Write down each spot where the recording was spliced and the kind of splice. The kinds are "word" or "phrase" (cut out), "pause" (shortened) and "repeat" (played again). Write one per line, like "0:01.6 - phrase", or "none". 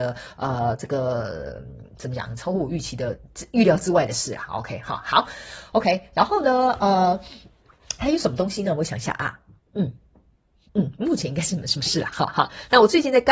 0:01.9 - pause